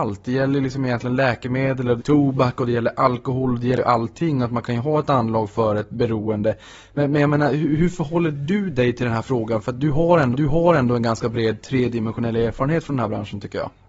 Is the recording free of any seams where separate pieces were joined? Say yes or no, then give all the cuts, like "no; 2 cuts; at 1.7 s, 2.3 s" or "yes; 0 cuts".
no; 2 cuts; at 2.0 s, 10.3 s